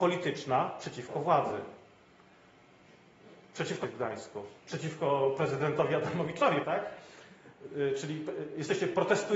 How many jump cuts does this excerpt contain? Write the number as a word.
three